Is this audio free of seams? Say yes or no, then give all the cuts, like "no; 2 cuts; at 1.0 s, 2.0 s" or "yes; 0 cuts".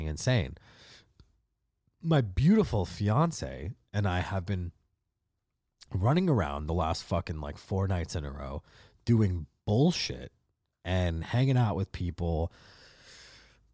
yes; 0 cuts